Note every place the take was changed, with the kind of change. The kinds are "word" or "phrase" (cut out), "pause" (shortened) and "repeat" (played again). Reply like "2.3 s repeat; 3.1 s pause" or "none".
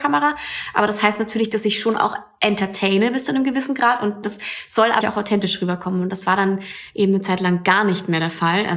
5.0 s word